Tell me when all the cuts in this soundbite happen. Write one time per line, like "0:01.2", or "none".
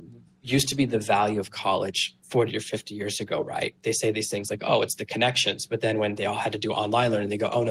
none